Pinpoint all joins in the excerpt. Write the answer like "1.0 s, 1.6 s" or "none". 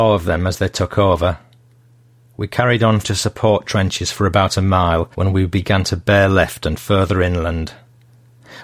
3.0 s, 5.1 s